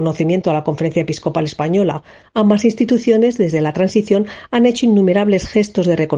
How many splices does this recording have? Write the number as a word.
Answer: zero